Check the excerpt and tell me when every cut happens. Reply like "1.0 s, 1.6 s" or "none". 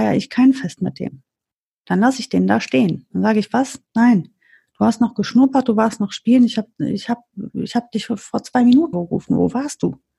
8.9 s

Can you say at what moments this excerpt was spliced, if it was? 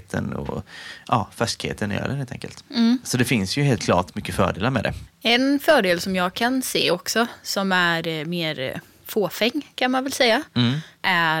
none

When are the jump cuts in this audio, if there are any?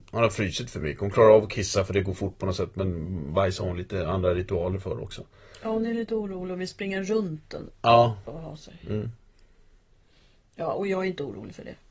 none

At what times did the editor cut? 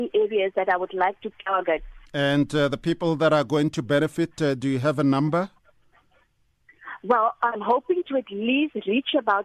2.1 s

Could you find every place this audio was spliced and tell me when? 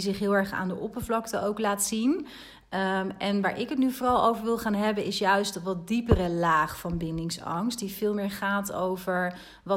none

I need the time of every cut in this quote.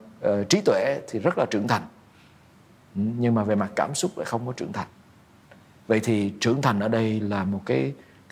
none

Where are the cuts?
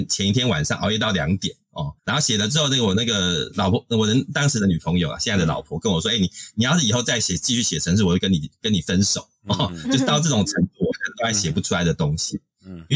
2.0 s

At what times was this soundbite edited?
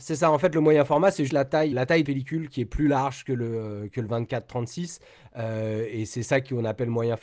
1.3 s, 1.7 s, 2.0 s

